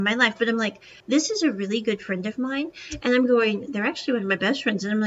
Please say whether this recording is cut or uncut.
cut